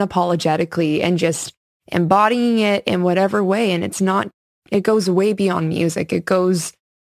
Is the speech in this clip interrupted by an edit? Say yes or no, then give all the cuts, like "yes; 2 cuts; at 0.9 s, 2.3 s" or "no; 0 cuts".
no; 0 cuts